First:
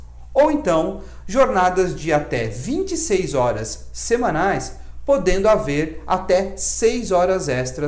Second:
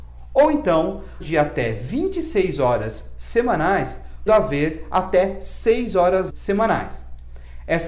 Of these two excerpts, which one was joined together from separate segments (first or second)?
second